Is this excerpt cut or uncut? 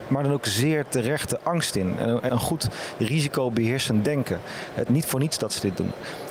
cut